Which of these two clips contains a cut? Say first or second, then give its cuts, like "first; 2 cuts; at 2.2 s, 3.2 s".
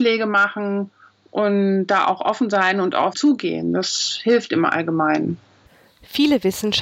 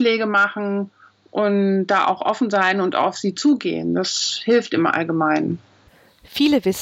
first; 1 cut; at 3.1 s